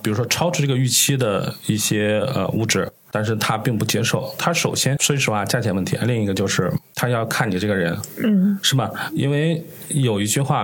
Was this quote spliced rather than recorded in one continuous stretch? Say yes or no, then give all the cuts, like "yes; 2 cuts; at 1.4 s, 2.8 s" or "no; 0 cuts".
no; 0 cuts